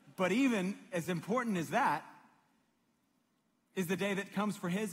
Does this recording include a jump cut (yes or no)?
no